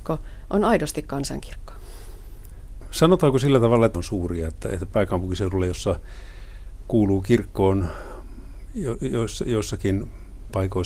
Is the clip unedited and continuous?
no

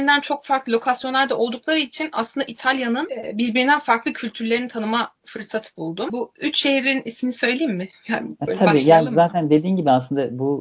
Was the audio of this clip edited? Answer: no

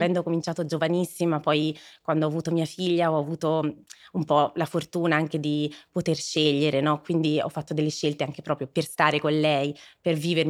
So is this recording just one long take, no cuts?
yes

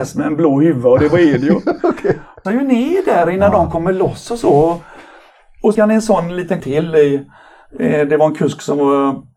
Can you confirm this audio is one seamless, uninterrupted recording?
no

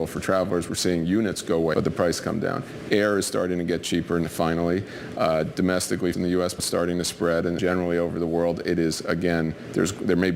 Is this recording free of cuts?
no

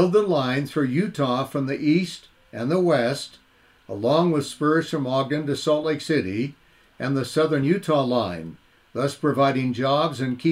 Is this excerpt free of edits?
yes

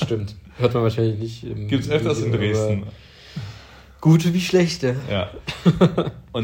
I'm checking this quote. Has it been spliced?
no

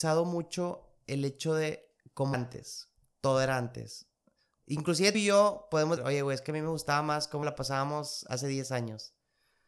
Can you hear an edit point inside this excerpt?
yes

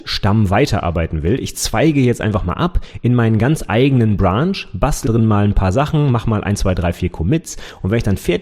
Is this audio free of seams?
no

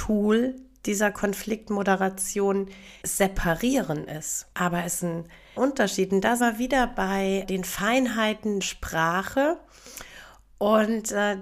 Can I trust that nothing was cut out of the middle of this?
no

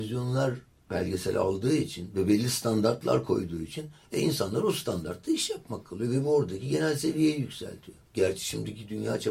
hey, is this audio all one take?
no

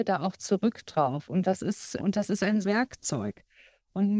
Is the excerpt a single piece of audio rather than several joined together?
no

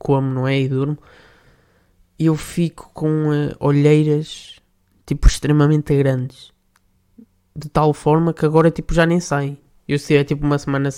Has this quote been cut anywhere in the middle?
no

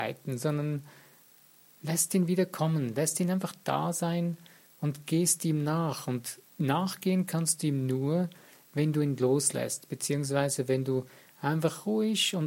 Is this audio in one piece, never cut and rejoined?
no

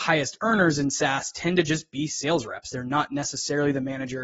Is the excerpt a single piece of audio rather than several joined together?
yes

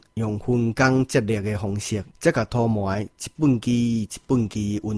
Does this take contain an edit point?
yes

